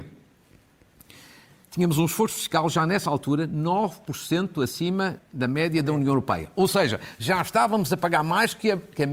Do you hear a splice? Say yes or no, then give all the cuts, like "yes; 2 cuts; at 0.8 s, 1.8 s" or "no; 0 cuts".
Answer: yes; 1 cut; at 5.2 s